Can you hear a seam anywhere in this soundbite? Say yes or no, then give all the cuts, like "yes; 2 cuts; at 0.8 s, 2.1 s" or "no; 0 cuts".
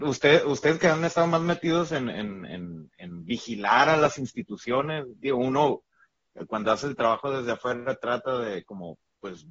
no; 0 cuts